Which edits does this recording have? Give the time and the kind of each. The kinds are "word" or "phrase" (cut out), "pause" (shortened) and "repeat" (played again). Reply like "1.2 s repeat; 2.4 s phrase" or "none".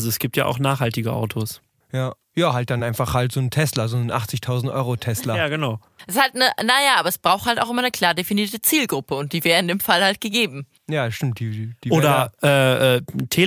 none